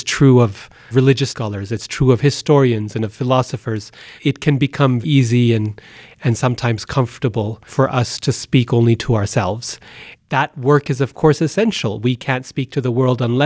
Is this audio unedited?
no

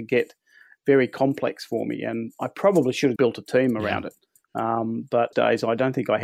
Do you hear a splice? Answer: yes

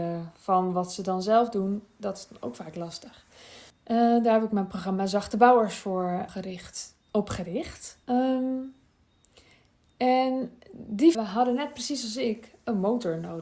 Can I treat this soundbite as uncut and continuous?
no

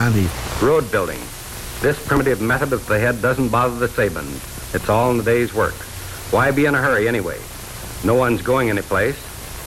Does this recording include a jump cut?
yes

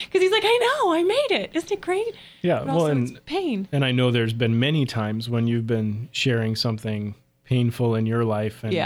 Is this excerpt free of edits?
yes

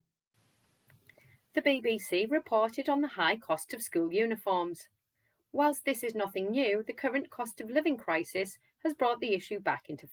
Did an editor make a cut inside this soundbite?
no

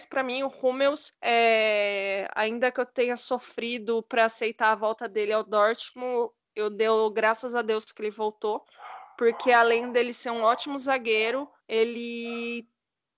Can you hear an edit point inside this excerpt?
yes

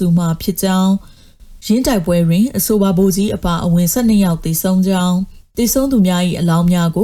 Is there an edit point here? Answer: yes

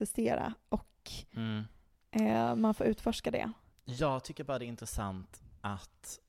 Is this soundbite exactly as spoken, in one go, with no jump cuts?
no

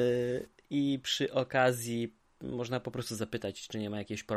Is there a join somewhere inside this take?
no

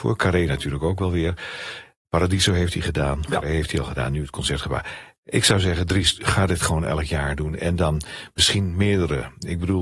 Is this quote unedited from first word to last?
yes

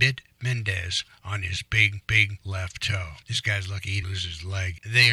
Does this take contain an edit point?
yes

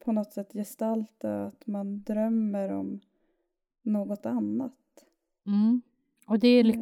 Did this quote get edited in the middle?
no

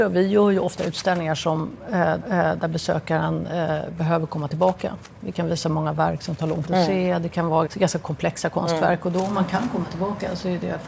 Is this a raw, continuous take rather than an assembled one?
no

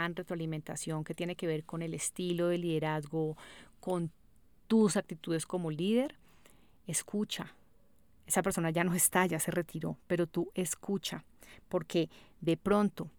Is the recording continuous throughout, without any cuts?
yes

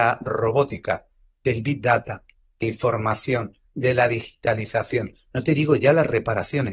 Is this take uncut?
no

